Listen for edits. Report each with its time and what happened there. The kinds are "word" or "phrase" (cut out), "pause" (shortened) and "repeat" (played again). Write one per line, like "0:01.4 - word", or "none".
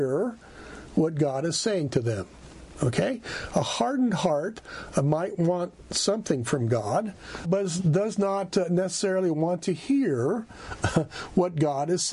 0:07.4 - word